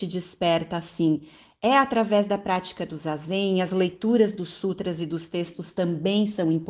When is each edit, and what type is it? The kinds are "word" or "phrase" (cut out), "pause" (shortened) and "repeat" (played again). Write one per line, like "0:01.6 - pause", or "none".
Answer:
none